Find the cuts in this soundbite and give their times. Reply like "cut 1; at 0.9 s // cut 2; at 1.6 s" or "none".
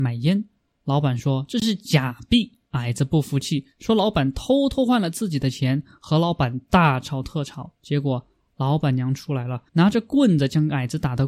cut 1; at 2.6 s // cut 2; at 7.8 s // cut 3; at 9.7 s